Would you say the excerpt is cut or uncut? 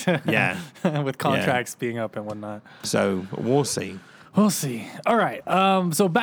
uncut